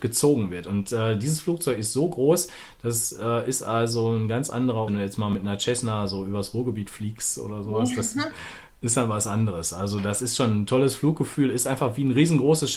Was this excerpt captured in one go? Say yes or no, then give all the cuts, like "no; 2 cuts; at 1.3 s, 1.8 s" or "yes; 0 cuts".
no; 1 cut; at 4.9 s